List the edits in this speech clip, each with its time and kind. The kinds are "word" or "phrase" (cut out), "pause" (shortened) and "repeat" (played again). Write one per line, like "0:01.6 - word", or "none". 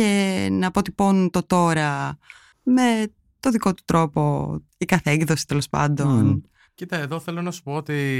none